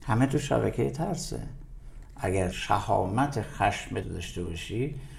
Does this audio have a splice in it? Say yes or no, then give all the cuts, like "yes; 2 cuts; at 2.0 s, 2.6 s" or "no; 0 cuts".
yes; 2 cuts; at 2.5 s, 4.0 s